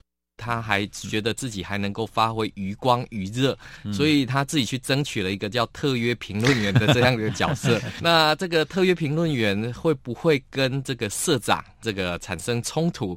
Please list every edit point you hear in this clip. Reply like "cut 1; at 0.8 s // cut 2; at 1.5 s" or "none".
cut 1; at 8.0 s // cut 2; at 11.8 s